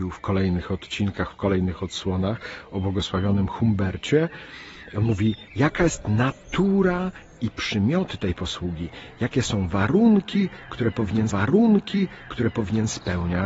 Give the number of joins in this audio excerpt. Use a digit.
2